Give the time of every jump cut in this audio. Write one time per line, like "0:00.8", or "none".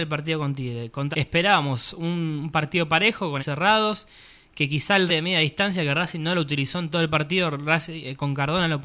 0:01.1
0:03.4
0:05.1